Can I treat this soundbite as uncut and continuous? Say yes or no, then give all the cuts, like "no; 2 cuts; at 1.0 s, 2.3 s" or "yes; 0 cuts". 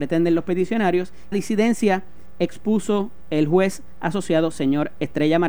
no; 1 cut; at 1.3 s